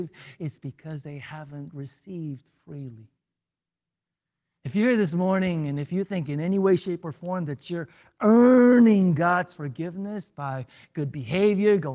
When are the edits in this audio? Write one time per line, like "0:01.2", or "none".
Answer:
none